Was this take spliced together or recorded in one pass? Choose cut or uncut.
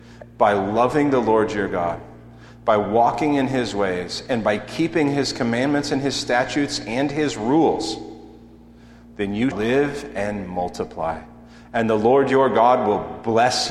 cut